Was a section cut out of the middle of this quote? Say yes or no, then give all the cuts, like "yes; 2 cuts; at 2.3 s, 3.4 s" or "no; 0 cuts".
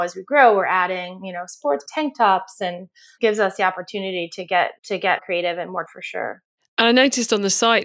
yes; 5 cuts; at 1.9 s, 3.2 s, 4.8 s, 5.2 s, 5.9 s